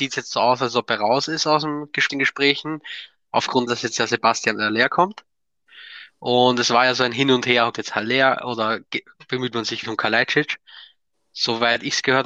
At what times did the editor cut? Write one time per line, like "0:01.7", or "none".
0:02.1
0:03.7
0:07.7
0:09.8